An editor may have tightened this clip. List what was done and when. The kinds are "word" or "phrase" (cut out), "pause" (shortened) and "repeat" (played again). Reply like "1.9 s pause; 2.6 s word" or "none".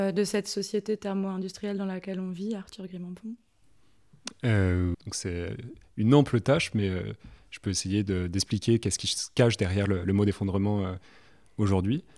4.9 s word